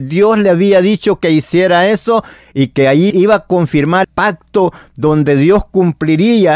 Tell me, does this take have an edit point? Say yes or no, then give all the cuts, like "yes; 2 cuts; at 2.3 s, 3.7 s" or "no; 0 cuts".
yes; 2 cuts; at 3.1 s, 4.0 s